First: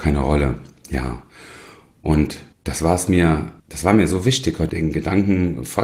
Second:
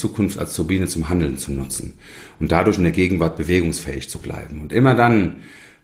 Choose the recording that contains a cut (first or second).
first